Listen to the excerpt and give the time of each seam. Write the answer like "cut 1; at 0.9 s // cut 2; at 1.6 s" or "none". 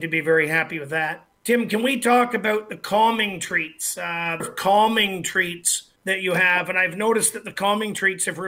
cut 1; at 1.4 s // cut 2; at 4.4 s // cut 3; at 6.0 s